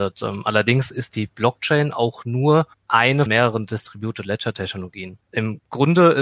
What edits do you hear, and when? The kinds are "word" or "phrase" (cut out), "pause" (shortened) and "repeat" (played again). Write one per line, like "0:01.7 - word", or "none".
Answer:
0:03.3 - word